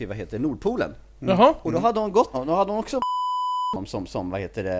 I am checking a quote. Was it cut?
yes; 1 cut; at 2.3 s

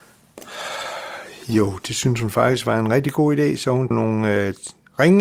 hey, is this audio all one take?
no; 1 cut; at 3.9 s

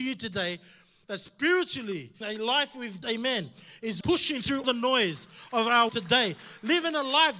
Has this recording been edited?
yes; 5 cuts; at 2.2 s, 3.0 s, 4.0 s, 4.6 s, 5.9 s

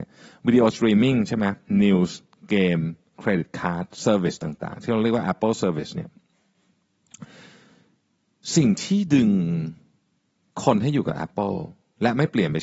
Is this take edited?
no; 0 cuts

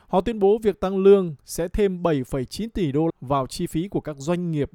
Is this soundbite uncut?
no; 1 cut; at 3.1 s

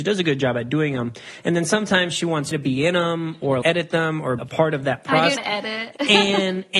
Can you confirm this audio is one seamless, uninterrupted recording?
no; 4 cuts; at 2.5 s, 3.6 s, 4.4 s, 5.4 s

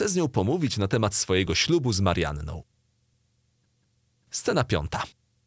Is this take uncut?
yes; 0 cuts

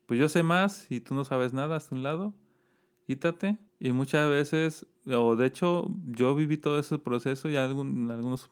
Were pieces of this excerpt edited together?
yes; 2 cuts; at 3.7 s, 4.9 s

